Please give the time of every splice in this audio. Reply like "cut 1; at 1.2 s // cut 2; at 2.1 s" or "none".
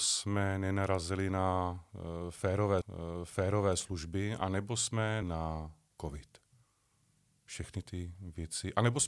cut 1; at 2.8 s // cut 2; at 5.2 s // cut 3; at 7.8 s